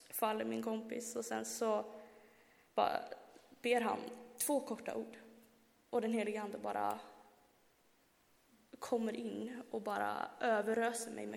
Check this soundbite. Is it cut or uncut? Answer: uncut